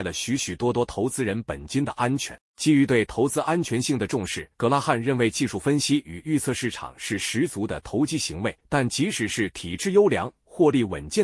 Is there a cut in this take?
yes; 3 cuts; at 2.4 s, 4.5 s, 8.6 s

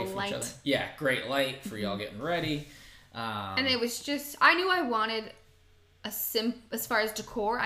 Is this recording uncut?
yes; 0 cuts

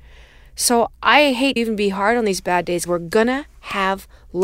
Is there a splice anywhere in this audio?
yes; 2 cuts; at 1.6 s, 2.9 s

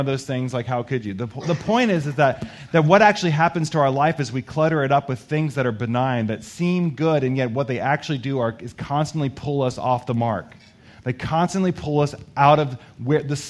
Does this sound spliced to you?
no; 0 cuts

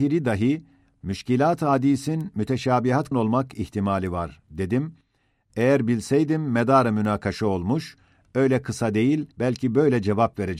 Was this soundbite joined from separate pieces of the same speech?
yes; 2 cuts; at 3.1 s, 9.3 s

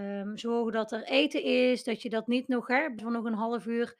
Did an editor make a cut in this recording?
yes; 1 cut; at 3.0 s

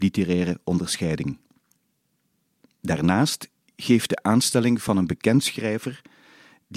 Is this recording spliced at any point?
no; 0 cuts

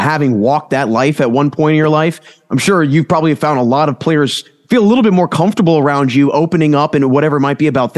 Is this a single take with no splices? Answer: yes; 0 cuts

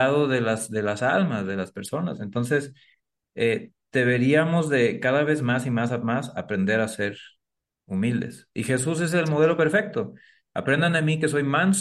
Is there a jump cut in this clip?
no; 0 cuts

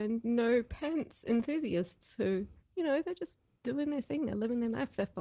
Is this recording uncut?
no; 1 cut; at 2.6 s

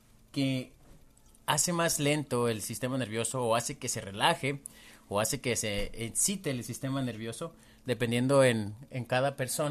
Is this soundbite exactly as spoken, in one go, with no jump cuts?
yes; 0 cuts

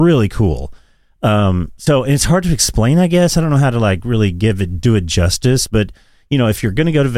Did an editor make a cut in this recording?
no; 0 cuts

